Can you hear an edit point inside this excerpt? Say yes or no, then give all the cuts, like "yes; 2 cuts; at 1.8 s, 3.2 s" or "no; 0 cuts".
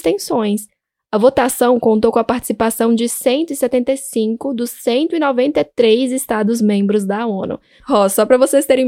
no; 0 cuts